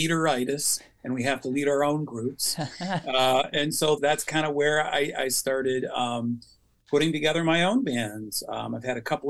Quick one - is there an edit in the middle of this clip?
yes; 1 cut; at 4.0 s

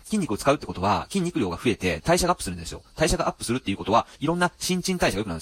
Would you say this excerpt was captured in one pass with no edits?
no; 1 cut; at 2.0 s

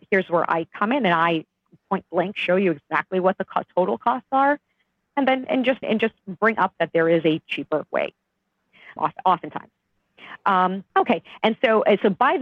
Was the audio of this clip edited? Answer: yes; 3 cuts; at 5.8 s, 9.0 s, 10.9 s

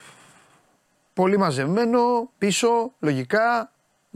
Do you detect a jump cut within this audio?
yes; 1 cut; at 2.3 s

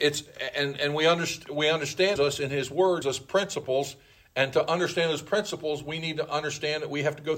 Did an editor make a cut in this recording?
yes; 2 cuts; at 2.2 s, 3.0 s

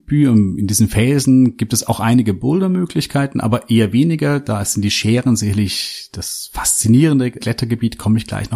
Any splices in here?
yes; 1 cut; at 7.4 s

